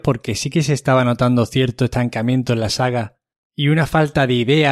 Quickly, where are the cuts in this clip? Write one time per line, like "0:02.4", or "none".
none